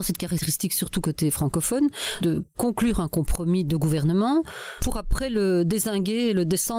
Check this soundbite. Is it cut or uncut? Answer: uncut